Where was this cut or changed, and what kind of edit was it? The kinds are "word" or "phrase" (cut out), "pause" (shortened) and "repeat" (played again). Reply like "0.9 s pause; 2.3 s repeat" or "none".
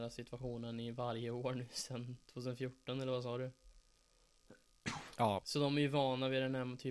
5.4 s word